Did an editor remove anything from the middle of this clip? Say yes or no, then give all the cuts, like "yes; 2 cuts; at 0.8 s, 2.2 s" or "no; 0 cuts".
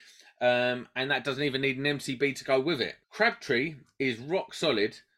yes; 1 cut; at 3.0 s